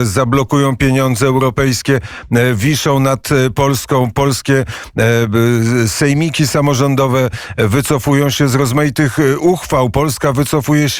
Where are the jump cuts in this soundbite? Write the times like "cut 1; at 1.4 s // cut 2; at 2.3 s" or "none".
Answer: none